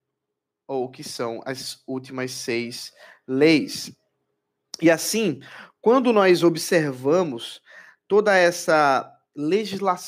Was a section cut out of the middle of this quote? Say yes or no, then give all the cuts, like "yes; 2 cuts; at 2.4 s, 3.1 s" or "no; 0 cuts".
no; 0 cuts